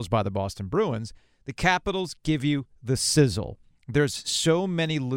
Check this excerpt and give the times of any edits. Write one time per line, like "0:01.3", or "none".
none